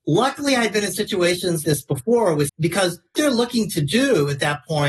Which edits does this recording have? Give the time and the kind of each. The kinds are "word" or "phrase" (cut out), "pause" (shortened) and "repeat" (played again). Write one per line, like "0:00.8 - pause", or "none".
0:01.6 - word
0:02.5 - word
0:03.1 - word

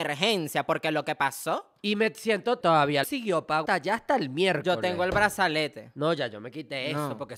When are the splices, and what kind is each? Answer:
0:02.6 - phrase
0:03.0 - word
0:03.7 - word

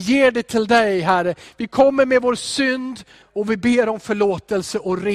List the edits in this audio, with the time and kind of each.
0:03.2 - word

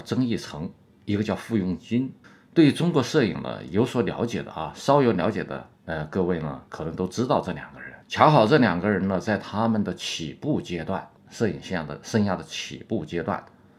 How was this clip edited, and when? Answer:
0:02.2 - pause
0:05.8 - pause
0:06.7 - pause
0:08.0 - pause
0:11.2 - pause

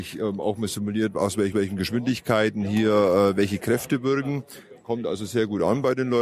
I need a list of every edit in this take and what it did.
0:01.5 - repeat

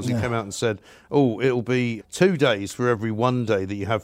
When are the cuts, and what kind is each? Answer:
0:02.0 - word

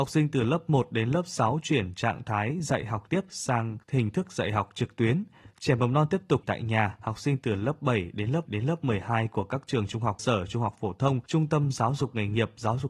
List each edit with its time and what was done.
0:03.1 - word
0:03.8 - pause
0:06.4 - word
0:08.5 - repeat
0:10.2 - word
0:11.3 - pause

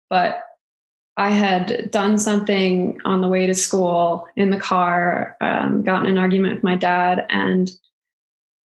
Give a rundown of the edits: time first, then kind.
0:00.9 - pause

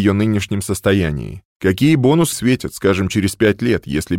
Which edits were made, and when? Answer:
0:01.5 - pause
0:02.3 - word

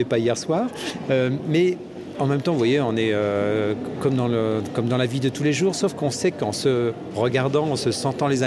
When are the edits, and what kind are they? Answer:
none

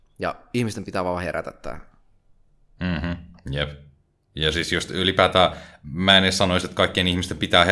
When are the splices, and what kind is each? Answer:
none

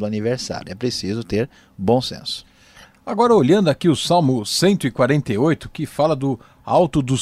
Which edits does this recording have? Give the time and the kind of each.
none

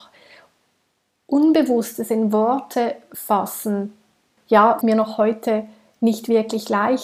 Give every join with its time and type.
0:04.4 - word
0:04.8 - word

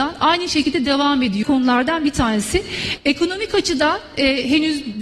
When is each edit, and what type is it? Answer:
0:01.4 - phrase

